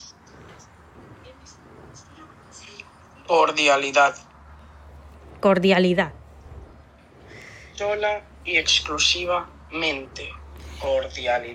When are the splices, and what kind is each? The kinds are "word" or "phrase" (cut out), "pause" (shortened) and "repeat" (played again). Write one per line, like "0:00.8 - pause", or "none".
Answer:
none